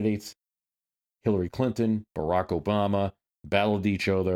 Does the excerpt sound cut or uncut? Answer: uncut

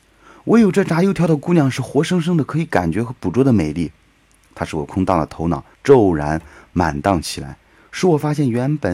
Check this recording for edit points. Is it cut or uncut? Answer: cut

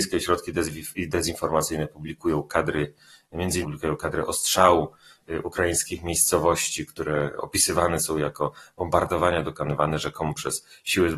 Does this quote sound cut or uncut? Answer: cut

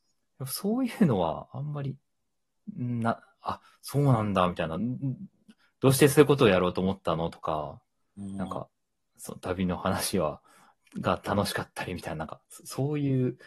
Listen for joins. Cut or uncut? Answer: uncut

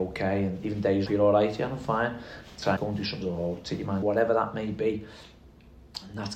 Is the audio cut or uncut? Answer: cut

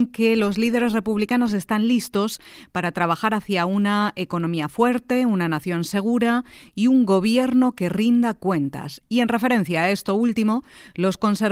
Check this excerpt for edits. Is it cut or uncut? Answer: uncut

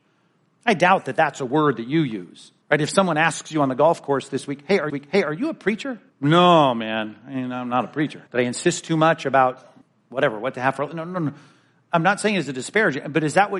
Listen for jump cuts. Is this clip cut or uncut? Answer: cut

